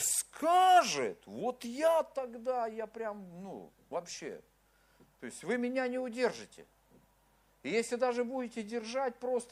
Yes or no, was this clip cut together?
no